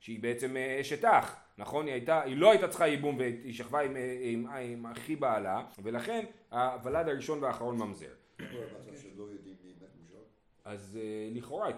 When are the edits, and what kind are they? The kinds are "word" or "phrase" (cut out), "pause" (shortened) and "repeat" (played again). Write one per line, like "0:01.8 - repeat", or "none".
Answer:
0:05.7 - pause